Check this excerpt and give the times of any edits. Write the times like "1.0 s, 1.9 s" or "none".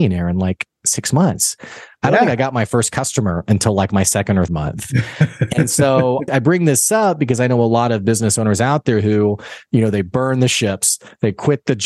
4.5 s, 6.3 s